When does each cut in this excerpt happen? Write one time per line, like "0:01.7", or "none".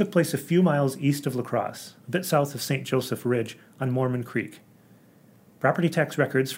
0:02.0